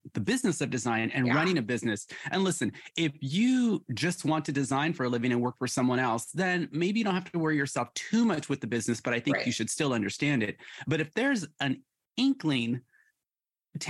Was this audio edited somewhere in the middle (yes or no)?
no